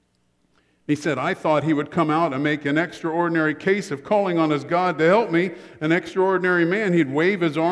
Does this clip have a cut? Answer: no; 0 cuts

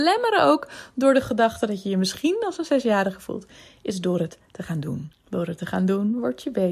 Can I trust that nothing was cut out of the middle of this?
no; 1 cut; at 5.1 s

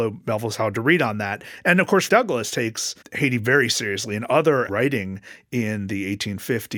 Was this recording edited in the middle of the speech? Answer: yes; 3 cuts; at 2.1 s, 3.0 s, 4.7 s

